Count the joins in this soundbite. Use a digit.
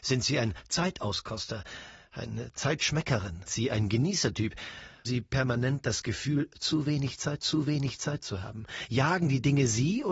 3